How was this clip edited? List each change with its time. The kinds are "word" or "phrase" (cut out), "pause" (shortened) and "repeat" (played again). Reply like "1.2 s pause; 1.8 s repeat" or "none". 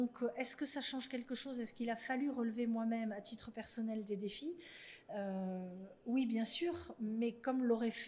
none